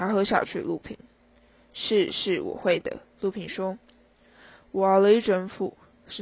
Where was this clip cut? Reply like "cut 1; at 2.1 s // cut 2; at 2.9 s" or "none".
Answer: none

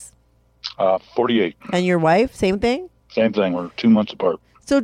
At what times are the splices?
cut 1; at 1.6 s // cut 2; at 3.0 s

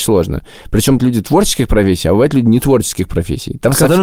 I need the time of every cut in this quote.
cut 1; at 1.0 s

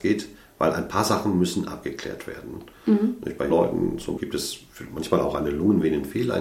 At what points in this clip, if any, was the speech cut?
cut 1; at 3.5 s // cut 2; at 4.2 s

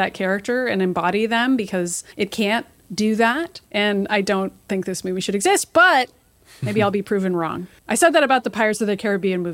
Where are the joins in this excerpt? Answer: cut 1; at 2.1 s // cut 2; at 3.6 s

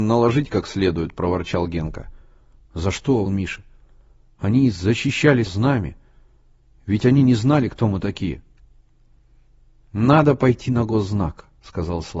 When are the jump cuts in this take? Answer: cut 1; at 3.3 s // cut 2; at 5.5 s

